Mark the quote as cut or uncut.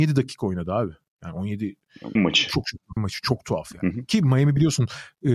cut